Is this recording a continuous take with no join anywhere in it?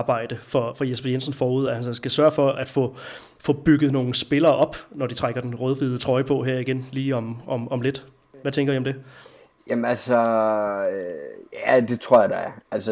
yes; 0 cuts

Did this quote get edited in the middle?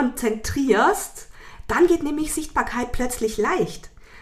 no; 0 cuts

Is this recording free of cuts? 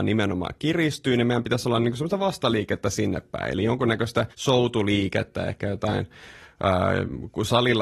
no; 1 cut; at 4.3 s

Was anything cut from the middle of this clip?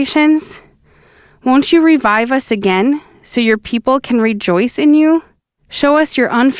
no; 0 cuts

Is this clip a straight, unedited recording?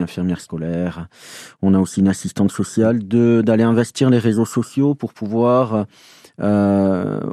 yes; 0 cuts

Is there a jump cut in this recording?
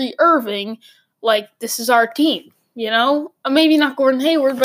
no; 0 cuts

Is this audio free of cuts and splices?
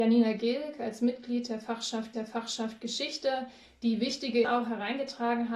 no; 2 cuts; at 2.1 s, 4.4 s

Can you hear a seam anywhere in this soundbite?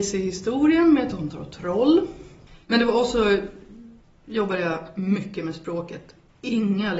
yes; 1 cut; at 2.6 s

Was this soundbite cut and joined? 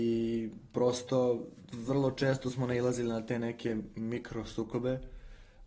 no; 0 cuts

